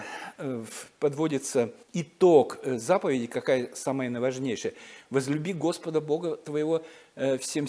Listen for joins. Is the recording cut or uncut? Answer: cut